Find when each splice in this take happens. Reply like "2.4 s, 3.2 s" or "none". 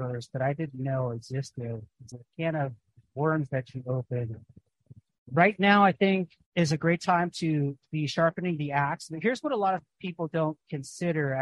2.1 s